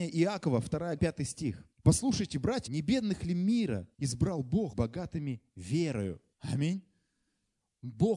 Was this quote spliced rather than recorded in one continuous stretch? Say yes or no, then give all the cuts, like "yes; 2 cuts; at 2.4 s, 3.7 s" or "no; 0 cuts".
yes; 6 cuts; at 1.0 s, 1.7 s, 2.7 s, 3.9 s, 4.7 s, 6.3 s